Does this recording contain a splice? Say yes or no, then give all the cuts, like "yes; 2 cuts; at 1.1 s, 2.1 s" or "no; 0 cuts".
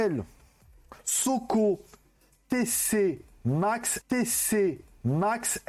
yes; 1 cut; at 4.0 s